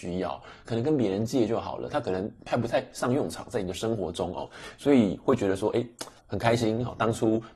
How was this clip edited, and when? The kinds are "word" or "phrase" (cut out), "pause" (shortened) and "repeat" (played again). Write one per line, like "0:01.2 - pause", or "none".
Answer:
0:06.2 - pause